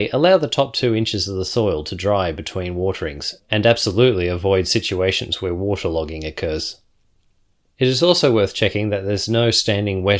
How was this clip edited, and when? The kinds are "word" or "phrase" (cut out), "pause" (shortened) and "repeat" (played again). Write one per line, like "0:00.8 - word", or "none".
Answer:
none